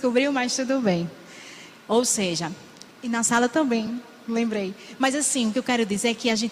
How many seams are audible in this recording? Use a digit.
1